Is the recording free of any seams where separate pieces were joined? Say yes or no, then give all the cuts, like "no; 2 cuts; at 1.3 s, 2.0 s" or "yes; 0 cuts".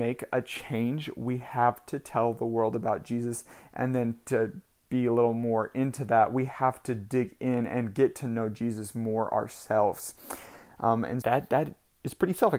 no; 1 cut; at 11.2 s